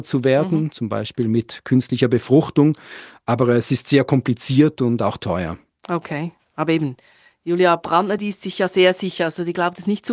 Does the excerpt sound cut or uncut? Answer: uncut